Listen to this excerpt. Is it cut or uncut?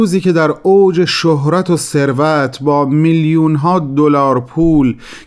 uncut